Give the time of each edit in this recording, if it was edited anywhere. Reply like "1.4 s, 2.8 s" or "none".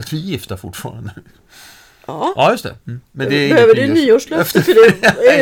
2.8 s